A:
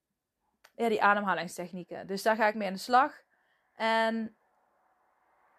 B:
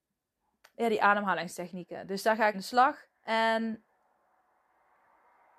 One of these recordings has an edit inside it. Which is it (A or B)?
B